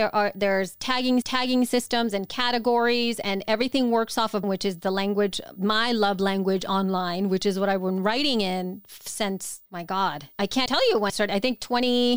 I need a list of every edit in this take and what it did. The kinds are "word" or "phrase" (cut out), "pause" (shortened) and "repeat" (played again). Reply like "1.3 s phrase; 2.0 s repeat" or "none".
1.2 s repeat; 4.4 s word; 9.7 s pause; 10.7 s word; 11.1 s word